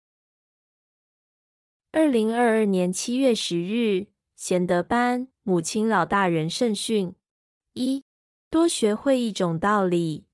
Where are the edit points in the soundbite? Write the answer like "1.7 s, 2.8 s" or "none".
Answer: 5.3 s, 7.4 s